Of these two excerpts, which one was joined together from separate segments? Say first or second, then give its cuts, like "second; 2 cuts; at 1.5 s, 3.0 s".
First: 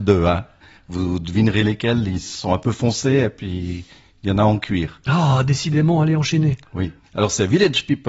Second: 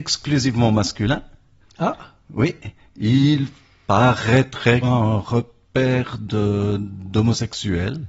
second; 1 cut; at 4.8 s